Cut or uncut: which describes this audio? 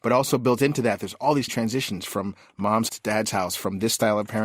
cut